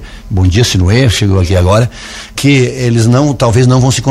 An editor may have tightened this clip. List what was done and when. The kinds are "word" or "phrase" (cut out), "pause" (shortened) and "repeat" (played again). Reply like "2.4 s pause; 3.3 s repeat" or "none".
2.3 s word